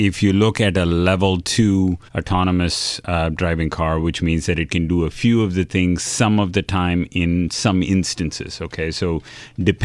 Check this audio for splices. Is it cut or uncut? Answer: cut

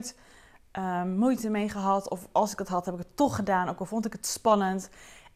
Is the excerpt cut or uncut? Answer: uncut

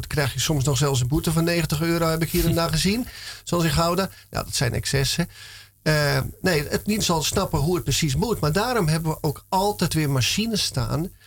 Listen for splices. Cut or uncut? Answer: cut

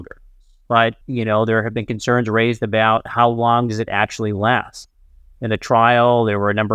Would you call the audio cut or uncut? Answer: cut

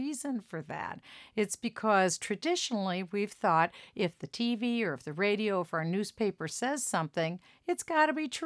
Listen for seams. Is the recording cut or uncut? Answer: uncut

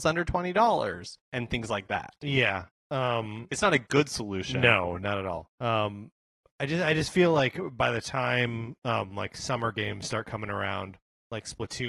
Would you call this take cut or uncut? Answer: cut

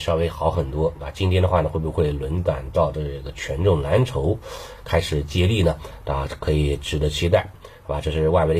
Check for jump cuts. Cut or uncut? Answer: uncut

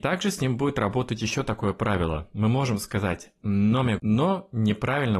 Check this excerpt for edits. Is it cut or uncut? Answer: cut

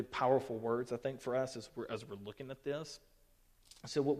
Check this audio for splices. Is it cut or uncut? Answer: uncut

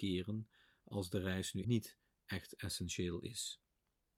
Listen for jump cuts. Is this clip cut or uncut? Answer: cut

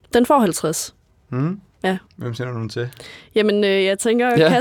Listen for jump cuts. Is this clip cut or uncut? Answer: cut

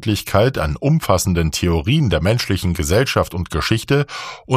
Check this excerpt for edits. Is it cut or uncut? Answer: uncut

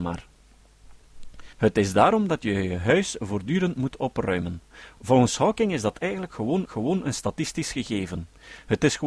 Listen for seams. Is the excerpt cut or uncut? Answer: cut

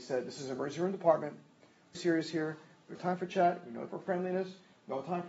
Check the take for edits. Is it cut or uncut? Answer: cut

